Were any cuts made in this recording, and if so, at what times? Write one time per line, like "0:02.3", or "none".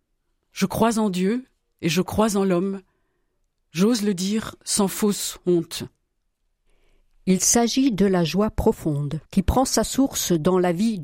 0:09.2